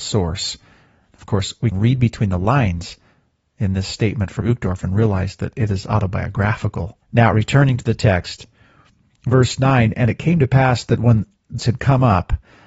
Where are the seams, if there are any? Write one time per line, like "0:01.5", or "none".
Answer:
0:01.7
0:04.4
0:07.0
0:11.6